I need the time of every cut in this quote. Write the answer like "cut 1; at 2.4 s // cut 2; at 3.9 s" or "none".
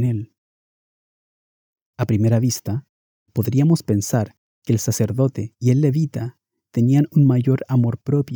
none